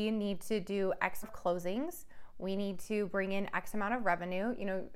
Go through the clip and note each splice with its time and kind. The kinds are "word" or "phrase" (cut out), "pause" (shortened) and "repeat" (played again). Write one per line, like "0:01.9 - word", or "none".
0:01.2 - word